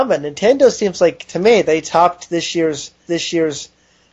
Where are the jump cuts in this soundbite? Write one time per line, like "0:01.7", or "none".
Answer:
0:03.1